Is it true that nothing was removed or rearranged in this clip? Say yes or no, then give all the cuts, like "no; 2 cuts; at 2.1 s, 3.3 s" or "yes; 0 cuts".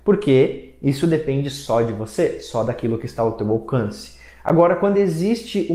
yes; 0 cuts